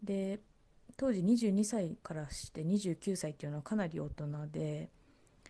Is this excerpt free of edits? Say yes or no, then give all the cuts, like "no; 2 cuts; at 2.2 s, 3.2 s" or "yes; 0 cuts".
no; 1 cut; at 2.0 s